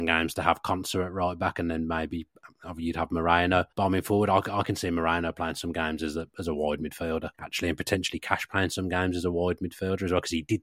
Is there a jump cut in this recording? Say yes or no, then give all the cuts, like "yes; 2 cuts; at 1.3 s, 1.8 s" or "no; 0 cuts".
yes; 2 cuts; at 3.7 s, 7.3 s